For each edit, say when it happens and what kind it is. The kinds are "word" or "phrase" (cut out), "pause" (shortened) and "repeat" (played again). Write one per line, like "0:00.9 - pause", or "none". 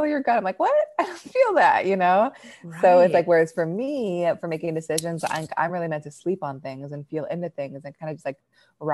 none